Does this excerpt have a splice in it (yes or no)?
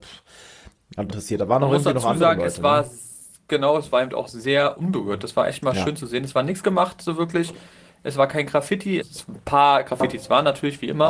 yes